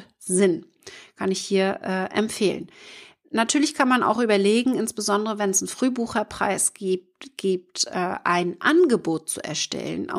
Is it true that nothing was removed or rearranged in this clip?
yes; 0 cuts

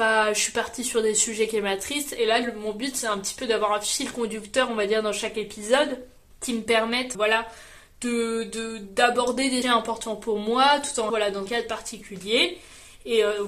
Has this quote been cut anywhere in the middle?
yes; 5 cuts; at 6.3 s, 7.1 s, 9.6 s, 11.1 s, 11.5 s

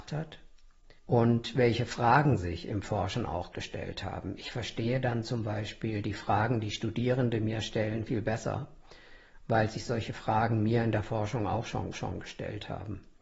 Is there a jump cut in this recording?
yes; 3 cuts; at 1.0 s, 8.1 s, 11.9 s

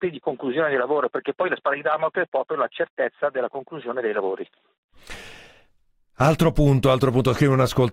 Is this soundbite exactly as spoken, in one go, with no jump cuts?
yes; 0 cuts

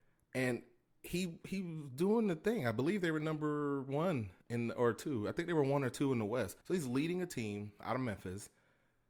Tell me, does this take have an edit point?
yes; 2 cuts; at 4.4 s, 6.6 s

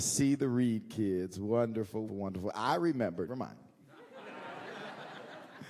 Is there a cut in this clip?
yes; 2 cuts; at 2.1 s, 3.3 s

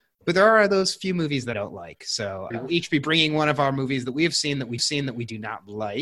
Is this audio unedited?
no; 3 cuts; at 1.5 s, 2.5 s, 4.8 s

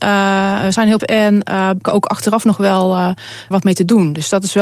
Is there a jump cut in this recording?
yes; 3 cuts; at 1.0 s, 1.8 s, 3.5 s

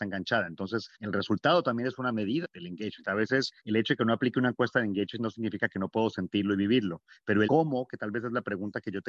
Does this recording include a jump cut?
yes; 4 cuts; at 0.9 s, 2.4 s, 3.6 s, 7.4 s

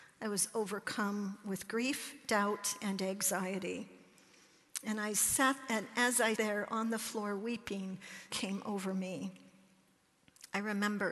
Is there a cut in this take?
yes; 2 cuts; at 6.3 s, 8.3 s

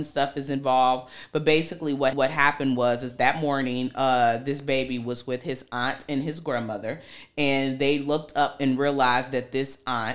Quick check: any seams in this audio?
yes; 1 cut; at 2.1 s

